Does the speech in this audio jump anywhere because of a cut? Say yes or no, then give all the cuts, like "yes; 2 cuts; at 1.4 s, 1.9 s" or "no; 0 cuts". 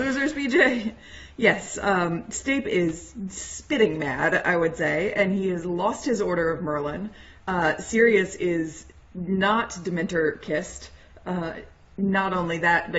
no; 0 cuts